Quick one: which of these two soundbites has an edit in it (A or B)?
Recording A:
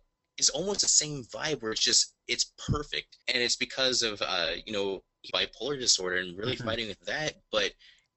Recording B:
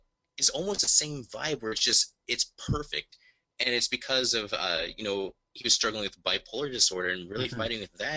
A